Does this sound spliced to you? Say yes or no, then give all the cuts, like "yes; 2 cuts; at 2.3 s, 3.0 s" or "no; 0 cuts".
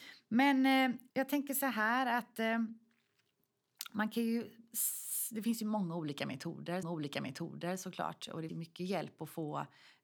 yes; 3 cuts; at 1.1 s, 6.8 s, 8.5 s